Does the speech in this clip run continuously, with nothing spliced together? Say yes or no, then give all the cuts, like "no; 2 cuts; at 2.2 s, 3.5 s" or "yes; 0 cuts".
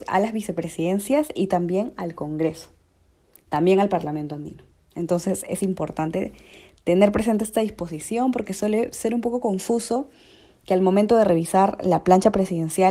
yes; 0 cuts